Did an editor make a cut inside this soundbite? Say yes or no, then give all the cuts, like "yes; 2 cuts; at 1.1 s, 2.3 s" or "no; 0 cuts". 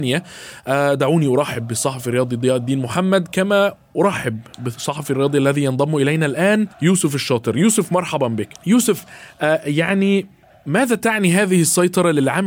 yes; 3 cuts; at 6.7 s, 8.6 s, 10.4 s